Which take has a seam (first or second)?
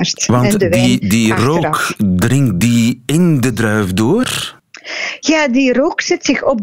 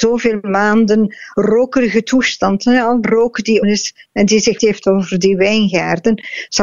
second